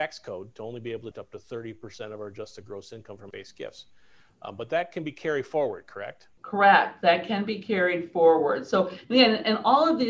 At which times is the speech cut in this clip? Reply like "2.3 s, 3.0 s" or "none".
1.1 s, 3.3 s, 6.4 s